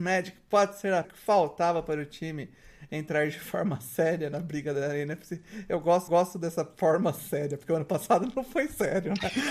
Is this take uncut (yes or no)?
no